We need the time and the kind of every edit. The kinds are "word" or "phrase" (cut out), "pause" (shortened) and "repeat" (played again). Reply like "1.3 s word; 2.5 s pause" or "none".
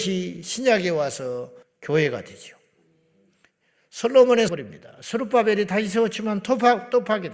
1.6 s pause; 4.5 s phrase